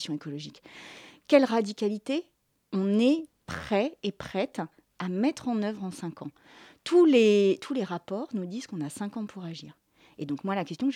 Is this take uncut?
yes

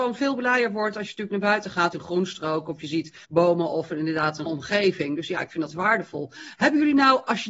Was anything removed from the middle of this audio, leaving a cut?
yes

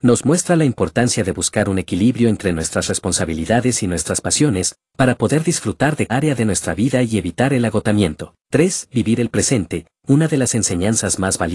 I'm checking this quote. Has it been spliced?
yes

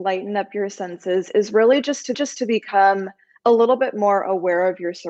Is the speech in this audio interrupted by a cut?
yes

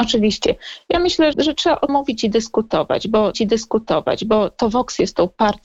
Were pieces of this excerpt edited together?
yes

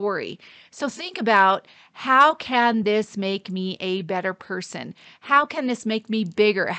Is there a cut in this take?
no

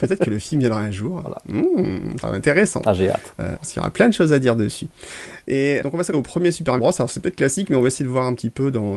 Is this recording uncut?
no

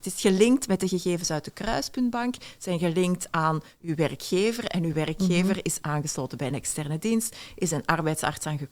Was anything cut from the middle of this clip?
no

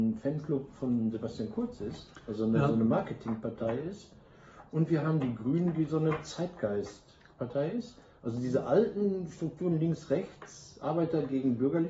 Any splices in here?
no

